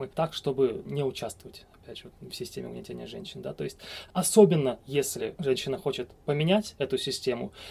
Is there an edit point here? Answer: no; 0 cuts

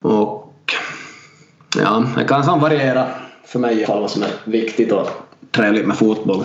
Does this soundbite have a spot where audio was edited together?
yes; 1 cut; at 3.8 s

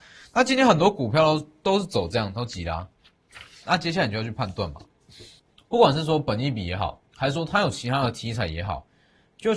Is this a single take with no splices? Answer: no; 2 cuts; at 5.4 s, 7.1 s

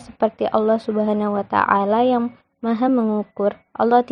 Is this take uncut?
yes; 0 cuts

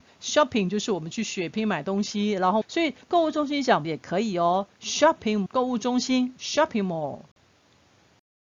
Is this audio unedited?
no; 3 cuts; at 2.6 s, 3.8 s, 5.5 s

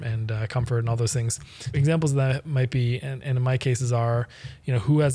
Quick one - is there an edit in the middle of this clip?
yes; 1 cut; at 1.7 s

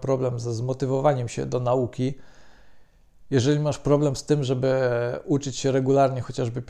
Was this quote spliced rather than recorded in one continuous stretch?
no; 0 cuts

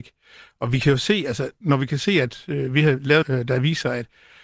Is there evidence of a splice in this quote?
yes; 1 cut; at 3.2 s

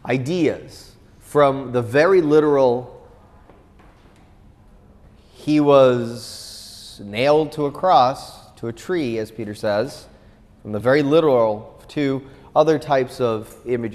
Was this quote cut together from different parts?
no; 0 cuts

